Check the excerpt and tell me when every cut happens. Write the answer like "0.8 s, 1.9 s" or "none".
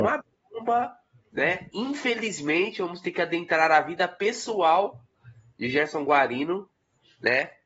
none